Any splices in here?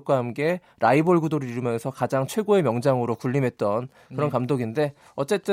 no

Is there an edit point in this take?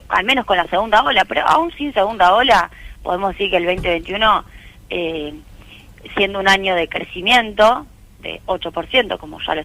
no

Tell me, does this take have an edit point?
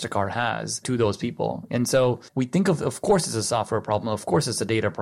yes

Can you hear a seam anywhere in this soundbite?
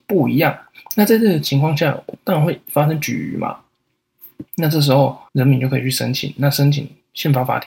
yes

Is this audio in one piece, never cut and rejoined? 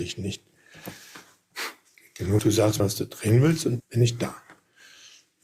no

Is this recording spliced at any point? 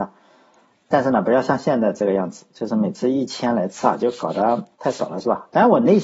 yes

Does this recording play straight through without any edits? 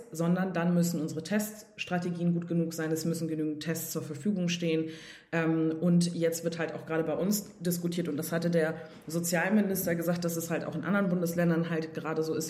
yes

